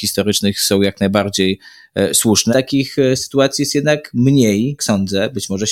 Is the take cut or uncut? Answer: cut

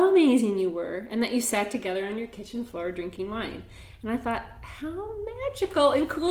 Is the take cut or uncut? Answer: uncut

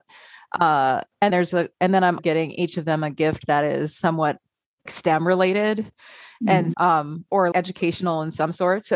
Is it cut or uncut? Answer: cut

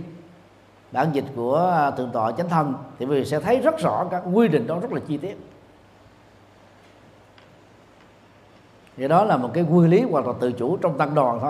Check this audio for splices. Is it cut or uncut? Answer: uncut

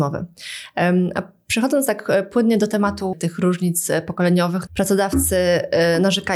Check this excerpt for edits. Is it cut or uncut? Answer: cut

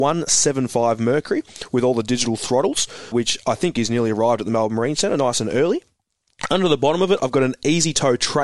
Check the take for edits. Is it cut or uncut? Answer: cut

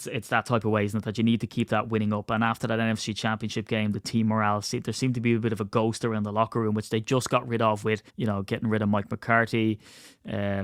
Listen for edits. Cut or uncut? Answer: cut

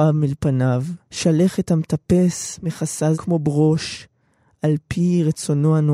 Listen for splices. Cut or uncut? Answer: cut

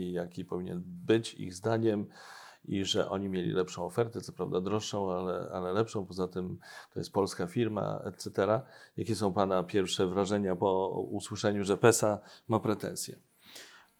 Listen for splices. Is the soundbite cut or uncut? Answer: uncut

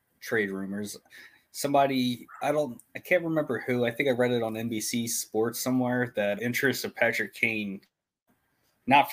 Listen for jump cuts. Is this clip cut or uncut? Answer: cut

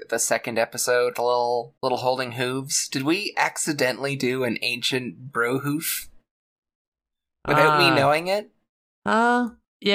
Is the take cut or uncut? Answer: cut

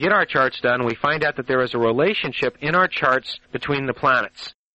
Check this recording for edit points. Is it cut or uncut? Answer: cut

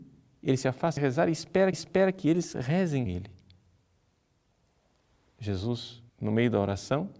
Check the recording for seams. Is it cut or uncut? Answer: cut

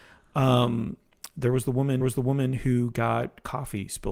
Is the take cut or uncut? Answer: cut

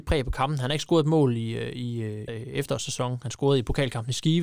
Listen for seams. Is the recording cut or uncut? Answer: cut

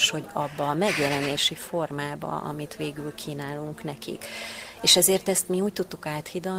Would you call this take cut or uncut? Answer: uncut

